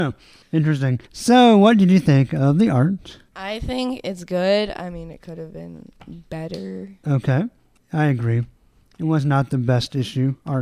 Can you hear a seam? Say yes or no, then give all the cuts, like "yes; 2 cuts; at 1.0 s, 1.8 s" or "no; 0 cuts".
yes; 3 cuts; at 1.1 s, 3.3 s, 7.0 s